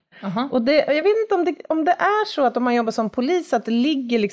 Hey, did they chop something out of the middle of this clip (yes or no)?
no